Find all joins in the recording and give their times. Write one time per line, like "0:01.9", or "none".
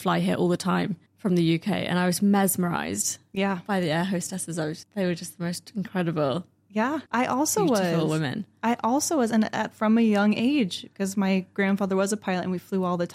0:01.1
0:04.8
0:07.1